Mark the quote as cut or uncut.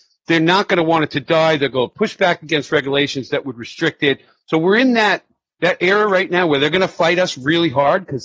uncut